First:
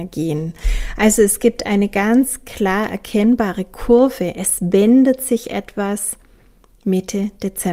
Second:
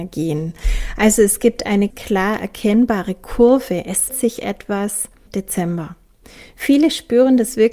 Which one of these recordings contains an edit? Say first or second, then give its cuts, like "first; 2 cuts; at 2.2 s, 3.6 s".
second; 3 cuts; at 1.9 s, 4.1 s, 5.3 s